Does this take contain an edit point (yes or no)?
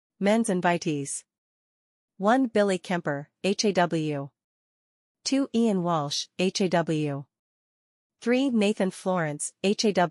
no